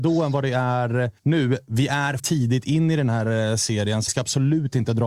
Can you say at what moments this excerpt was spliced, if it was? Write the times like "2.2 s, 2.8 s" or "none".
1.2 s, 2.2 s, 4.1 s